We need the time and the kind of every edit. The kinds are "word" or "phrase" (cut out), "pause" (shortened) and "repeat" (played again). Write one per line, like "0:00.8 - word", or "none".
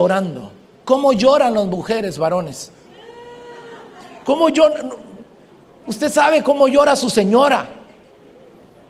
none